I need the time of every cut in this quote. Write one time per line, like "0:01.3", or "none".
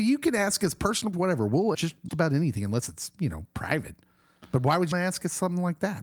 0:01.1
0:01.7
0:02.1
0:04.9